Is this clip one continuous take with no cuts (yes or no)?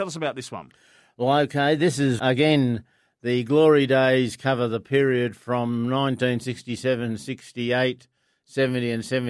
no